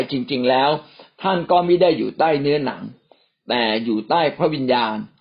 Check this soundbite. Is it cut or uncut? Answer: uncut